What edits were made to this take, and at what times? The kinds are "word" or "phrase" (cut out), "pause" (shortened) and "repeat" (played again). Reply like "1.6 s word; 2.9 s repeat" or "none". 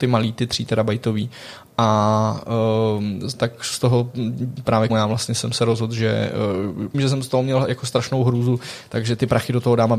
4.9 s phrase; 6.9 s phrase